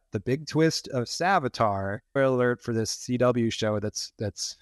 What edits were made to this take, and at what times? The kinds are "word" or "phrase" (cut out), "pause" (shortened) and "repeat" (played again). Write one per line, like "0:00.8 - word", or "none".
0:02.2 - word